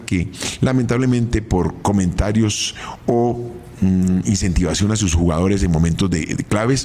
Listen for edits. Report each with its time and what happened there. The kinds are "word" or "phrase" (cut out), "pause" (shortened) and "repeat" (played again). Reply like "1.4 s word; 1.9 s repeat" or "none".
none